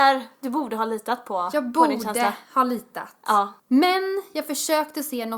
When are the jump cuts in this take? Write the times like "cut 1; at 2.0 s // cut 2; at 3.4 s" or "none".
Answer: cut 1; at 3.6 s